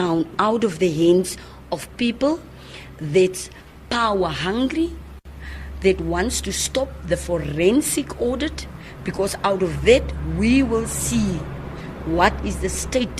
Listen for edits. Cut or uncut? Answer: uncut